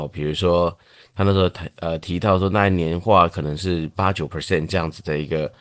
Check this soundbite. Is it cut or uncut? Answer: uncut